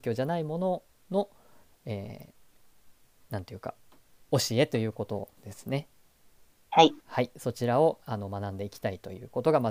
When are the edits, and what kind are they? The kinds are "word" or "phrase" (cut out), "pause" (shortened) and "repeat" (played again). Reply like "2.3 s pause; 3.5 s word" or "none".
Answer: 5.4 s pause

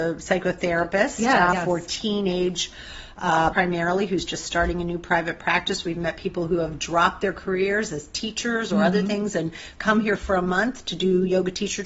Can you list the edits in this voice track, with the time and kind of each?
1.5 s word; 3.5 s word

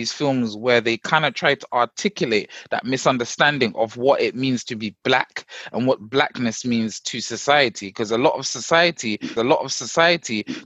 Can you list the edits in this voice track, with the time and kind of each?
9.4 s repeat

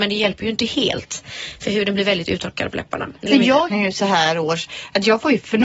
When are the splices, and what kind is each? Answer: 3.3 s word; 3.7 s word

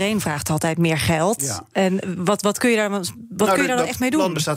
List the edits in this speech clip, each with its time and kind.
none

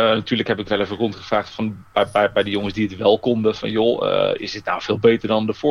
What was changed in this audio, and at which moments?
4.4 s word

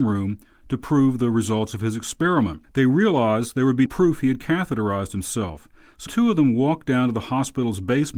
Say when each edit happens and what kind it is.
3.9 s word; 6.1 s word

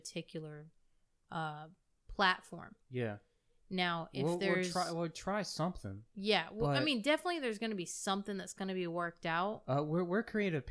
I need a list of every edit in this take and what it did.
none

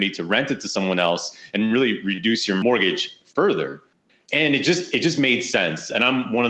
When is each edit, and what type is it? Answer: none

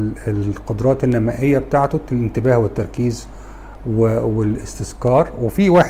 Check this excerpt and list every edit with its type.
none

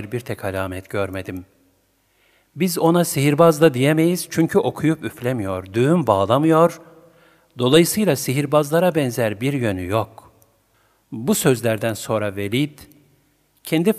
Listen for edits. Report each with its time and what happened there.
none

